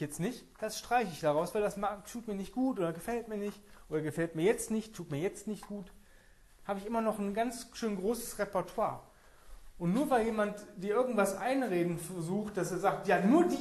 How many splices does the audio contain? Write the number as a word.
zero